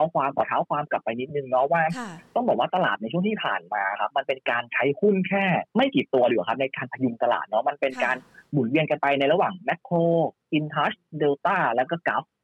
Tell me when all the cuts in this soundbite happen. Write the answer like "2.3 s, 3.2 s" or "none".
5.7 s

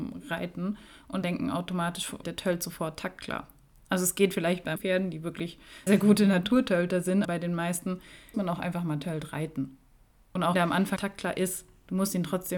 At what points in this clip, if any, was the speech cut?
1.2 s, 2.2 s, 4.8 s, 5.9 s, 7.2 s, 8.3 s, 10.5 s, 11.0 s

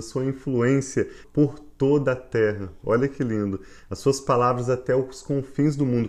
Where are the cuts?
1.2 s

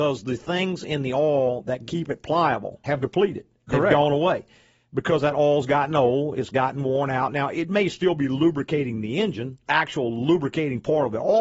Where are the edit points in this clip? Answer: none

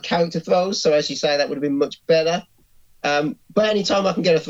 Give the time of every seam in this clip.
none

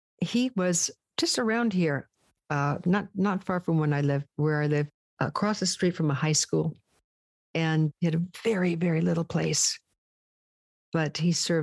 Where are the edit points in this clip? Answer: none

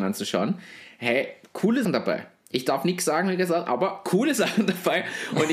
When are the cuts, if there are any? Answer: 1.8 s

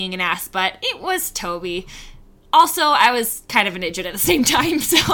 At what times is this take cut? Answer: none

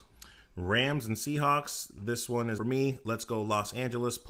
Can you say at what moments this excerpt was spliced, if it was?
2.6 s

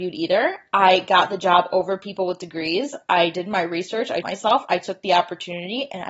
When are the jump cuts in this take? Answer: 4.2 s

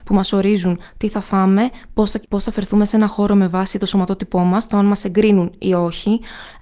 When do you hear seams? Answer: 2.3 s

